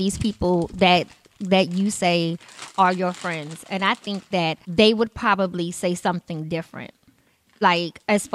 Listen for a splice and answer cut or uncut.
cut